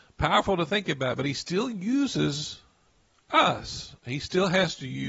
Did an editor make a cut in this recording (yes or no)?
no